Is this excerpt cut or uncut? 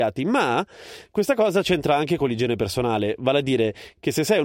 uncut